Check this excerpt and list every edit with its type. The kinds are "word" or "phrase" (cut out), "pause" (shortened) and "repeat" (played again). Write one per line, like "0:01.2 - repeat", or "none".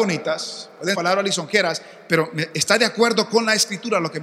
0:00.9 - word